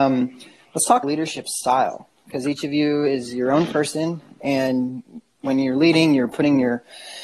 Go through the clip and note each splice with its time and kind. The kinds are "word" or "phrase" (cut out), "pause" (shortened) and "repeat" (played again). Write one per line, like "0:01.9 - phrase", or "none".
0:01.0 - word